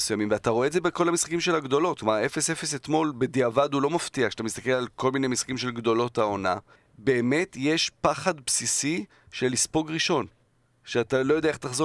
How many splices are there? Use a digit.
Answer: 1